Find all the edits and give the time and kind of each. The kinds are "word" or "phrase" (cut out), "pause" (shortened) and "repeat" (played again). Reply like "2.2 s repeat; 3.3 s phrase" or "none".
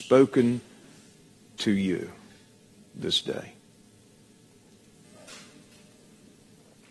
none